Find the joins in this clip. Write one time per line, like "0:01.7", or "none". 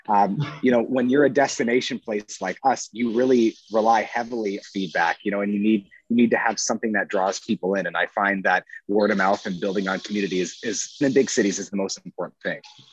0:04.6
0:11.0